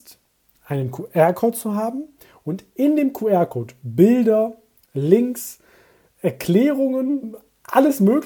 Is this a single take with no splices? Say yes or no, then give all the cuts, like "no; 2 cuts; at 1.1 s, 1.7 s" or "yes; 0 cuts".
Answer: yes; 0 cuts